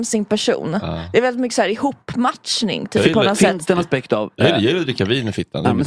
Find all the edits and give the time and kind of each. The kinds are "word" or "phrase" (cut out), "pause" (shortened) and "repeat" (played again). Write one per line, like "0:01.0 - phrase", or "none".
none